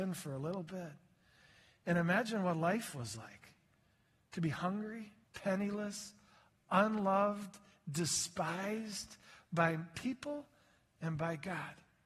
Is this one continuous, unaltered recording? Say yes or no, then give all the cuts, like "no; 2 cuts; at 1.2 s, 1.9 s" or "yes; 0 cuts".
no; 1 cut; at 5.2 s